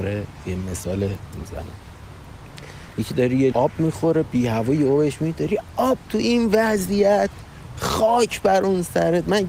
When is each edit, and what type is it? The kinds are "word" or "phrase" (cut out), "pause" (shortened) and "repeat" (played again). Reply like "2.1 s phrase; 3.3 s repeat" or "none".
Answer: 1.3 s word; 3.5 s word; 6.0 s word

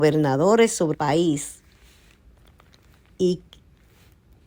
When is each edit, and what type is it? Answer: 0.9 s word

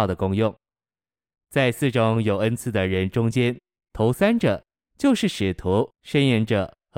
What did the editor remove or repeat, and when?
5.9 s pause

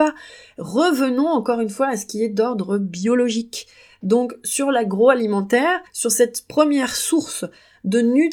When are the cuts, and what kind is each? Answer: 5.9 s pause

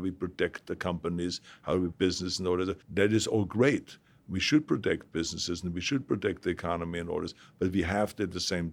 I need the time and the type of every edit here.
1.9 s word; 2.8 s pause

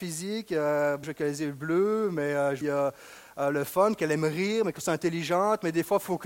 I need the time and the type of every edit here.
1.0 s word; 2.6 s phrase

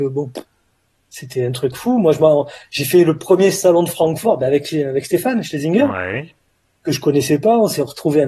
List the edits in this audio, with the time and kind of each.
none

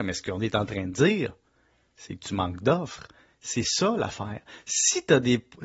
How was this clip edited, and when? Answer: none

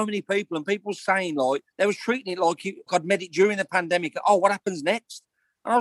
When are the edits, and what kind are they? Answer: 1.7 s pause; 2.9 s word

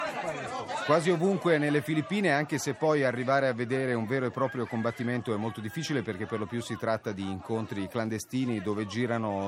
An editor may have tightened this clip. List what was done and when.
none

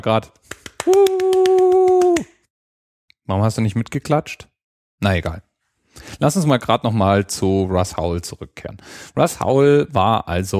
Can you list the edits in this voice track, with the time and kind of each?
none

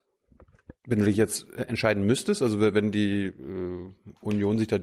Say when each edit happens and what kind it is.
none

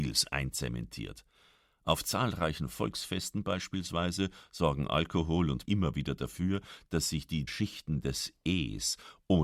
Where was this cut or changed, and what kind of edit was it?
5.7 s word; 7.5 s word

